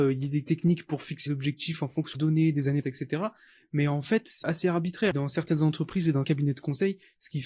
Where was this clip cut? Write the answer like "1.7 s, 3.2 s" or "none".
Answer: 1.3 s, 2.1 s, 2.8 s, 4.4 s, 6.2 s